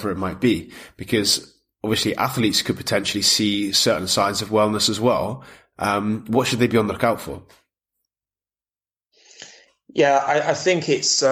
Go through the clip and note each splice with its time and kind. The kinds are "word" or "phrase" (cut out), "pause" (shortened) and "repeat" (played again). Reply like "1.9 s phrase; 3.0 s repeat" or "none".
none

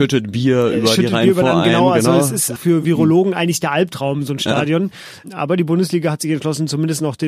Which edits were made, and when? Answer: 2.6 s word

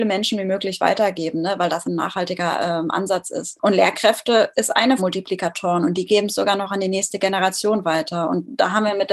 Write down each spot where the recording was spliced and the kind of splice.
1.8 s word; 4.5 s word; 5.0 s phrase

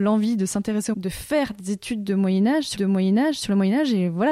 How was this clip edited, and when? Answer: 0.9 s phrase; 2.8 s repeat

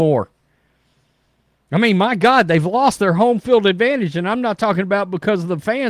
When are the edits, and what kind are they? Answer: none

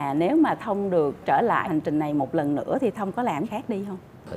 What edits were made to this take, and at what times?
1.2 s word; 1.6 s word; 3.4 s word

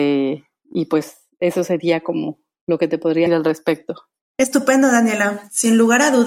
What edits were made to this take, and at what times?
3.3 s word

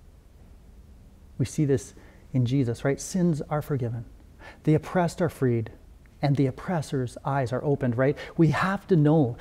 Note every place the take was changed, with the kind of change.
none

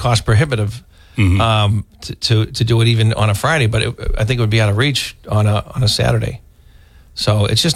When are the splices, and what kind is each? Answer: none

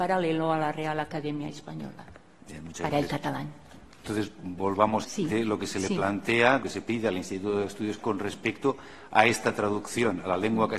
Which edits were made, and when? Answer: 5.0 s phrase; 6.6 s word; 8.0 s word

